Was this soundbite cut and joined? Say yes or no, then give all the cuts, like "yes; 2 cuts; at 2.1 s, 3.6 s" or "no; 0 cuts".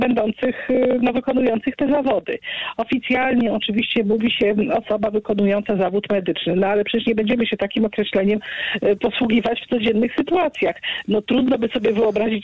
no; 0 cuts